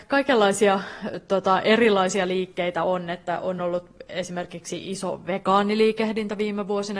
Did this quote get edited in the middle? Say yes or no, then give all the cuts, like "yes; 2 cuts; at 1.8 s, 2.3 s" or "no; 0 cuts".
no; 0 cuts